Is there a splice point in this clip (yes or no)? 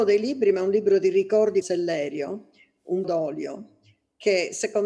yes